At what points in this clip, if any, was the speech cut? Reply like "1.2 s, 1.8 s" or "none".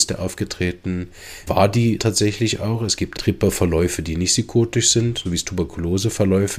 1.5 s, 2.0 s, 3.2 s, 5.2 s